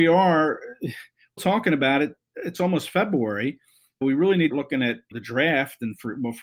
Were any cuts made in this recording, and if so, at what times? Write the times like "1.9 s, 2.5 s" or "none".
1.4 s, 4.0 s, 4.5 s, 5.1 s

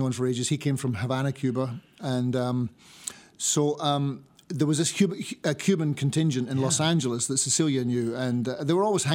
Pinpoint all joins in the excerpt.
none

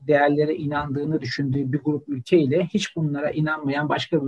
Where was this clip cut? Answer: none

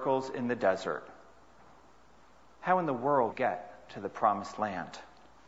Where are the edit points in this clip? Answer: 3.3 s

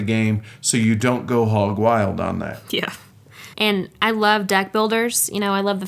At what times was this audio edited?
3.5 s

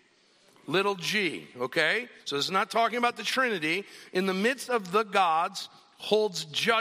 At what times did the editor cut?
2.2 s

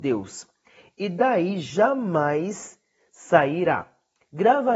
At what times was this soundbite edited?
none

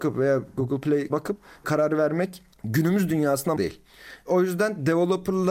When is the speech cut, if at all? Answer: 1.1 s, 1.6 s, 2.5 s, 3.6 s

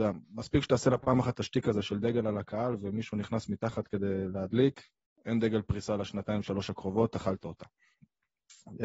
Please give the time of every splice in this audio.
none

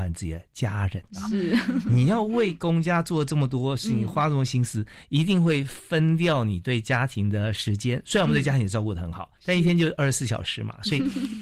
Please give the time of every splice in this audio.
1.1 s, 9.4 s

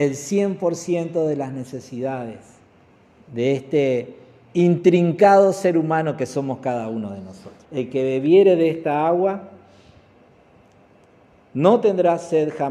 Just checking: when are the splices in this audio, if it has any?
7.6 s

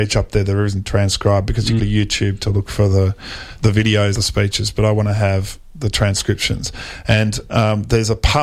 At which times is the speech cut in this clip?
1.8 s, 3.6 s, 4.1 s

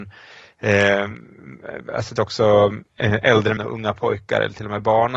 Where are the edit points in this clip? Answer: 2.2 s, 3.6 s

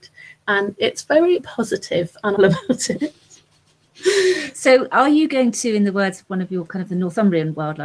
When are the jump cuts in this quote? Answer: 1.4 s, 2.4 s

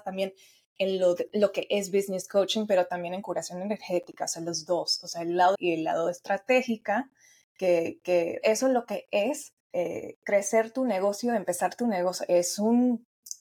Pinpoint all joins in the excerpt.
5.5 s, 8.4 s, 9.6 s

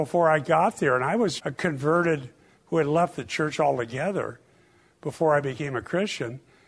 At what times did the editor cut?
1.4 s, 2.6 s

